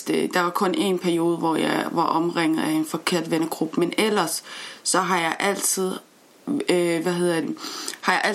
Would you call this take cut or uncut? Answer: cut